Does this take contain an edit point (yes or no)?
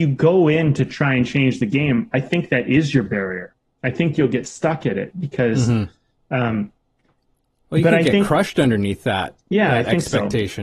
no